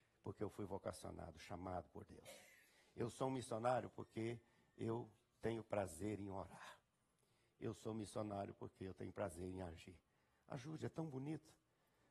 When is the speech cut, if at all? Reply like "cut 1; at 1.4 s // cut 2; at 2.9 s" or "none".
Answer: none